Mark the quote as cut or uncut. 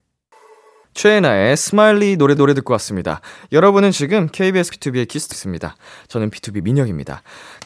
cut